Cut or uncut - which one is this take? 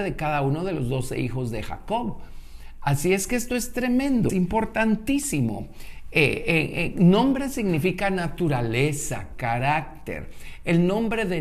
cut